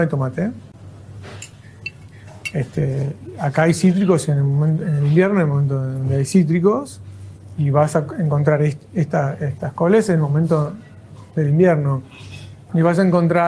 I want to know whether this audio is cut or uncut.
uncut